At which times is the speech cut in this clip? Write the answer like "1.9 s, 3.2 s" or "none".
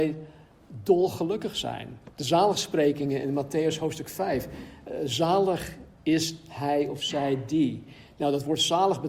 2.1 s